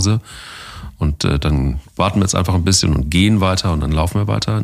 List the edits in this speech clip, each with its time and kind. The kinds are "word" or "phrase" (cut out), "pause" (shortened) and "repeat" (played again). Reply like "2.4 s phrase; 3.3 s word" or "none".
none